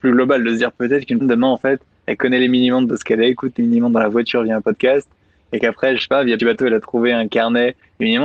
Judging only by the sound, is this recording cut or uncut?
cut